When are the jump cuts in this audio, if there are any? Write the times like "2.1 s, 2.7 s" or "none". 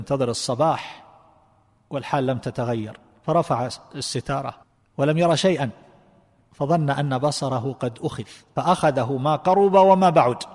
4.6 s